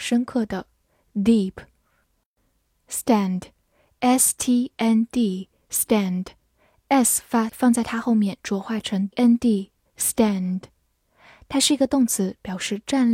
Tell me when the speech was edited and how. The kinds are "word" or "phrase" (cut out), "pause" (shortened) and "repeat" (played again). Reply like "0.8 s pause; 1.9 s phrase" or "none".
4.7 s word; 7.5 s word; 9.1 s word; 9.9 s word